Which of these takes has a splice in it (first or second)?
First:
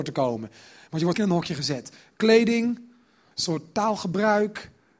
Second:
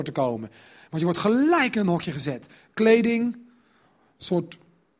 first